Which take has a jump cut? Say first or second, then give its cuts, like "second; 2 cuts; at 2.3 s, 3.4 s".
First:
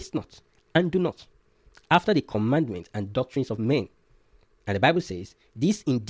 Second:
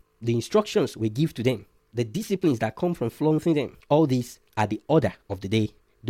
second; 1 cut; at 3.8 s